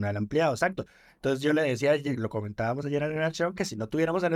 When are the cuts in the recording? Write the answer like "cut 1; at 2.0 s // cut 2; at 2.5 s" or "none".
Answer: none